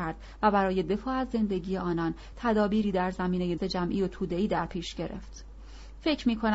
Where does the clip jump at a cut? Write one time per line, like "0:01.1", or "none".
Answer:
0:03.6